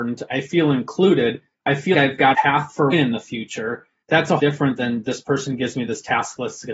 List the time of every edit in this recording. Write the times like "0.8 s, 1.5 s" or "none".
1.9 s, 2.3 s, 2.9 s, 4.0 s, 4.4 s